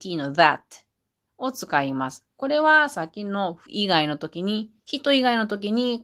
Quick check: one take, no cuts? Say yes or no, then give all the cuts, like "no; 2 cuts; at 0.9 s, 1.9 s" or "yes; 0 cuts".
no; 2 cuts; at 3.7 s, 4.8 s